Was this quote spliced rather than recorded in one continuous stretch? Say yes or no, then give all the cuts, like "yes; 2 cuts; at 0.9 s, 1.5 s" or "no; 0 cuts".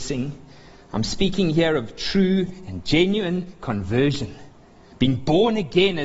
no; 0 cuts